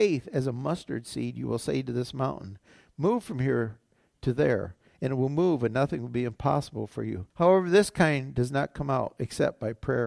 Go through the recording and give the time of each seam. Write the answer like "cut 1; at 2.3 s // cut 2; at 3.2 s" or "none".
cut 1; at 7.3 s